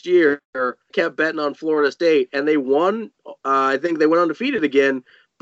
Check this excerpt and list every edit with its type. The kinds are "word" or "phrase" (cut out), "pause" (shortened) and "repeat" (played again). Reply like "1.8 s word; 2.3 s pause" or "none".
0.9 s word